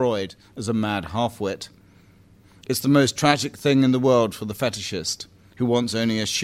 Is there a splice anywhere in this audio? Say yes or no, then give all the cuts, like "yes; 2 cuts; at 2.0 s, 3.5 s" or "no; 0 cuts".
no; 0 cuts